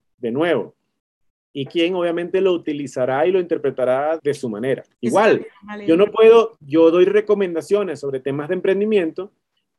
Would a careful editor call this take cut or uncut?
cut